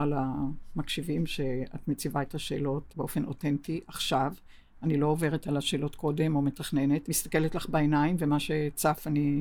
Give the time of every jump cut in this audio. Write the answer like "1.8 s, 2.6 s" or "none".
2.9 s, 7.1 s